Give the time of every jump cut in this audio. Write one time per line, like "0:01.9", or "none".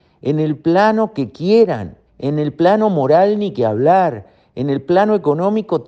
0:02.1